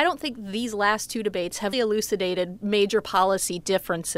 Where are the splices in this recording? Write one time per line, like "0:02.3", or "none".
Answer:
0:01.7